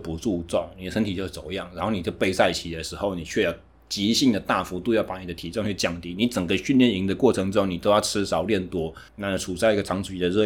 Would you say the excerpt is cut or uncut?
cut